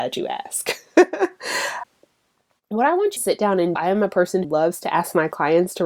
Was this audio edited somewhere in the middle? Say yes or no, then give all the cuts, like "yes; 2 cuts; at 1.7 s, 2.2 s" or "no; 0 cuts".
yes; 3 cuts; at 3.2 s, 3.8 s, 4.4 s